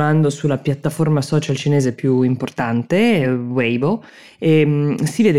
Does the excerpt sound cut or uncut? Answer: uncut